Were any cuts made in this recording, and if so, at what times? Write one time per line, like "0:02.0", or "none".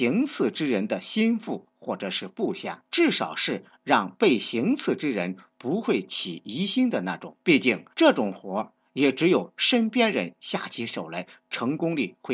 0:02.9
0:07.4
0:07.9